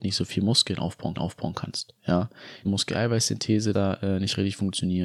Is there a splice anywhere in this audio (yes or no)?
yes